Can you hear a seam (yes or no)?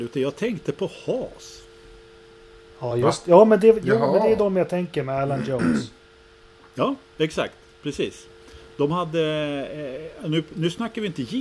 no